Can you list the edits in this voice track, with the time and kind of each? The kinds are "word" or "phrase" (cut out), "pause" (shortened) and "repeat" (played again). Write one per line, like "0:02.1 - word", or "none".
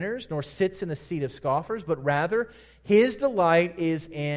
none